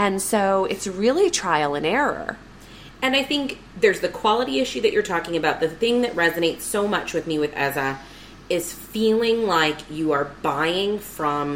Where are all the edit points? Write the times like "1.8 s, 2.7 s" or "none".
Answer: none